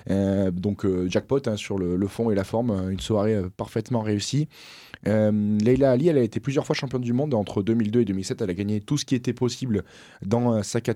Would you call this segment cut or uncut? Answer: uncut